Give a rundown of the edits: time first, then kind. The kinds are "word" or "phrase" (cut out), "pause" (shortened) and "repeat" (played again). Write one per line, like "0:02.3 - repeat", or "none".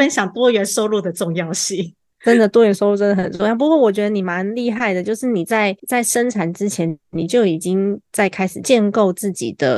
0:02.1 - pause
0:05.8 - pause